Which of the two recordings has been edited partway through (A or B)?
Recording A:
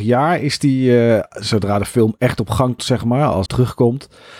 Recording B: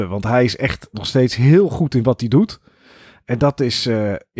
A